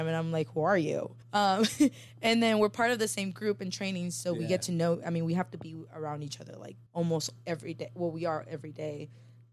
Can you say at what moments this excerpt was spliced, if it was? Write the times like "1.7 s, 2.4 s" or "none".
1.2 s, 6.9 s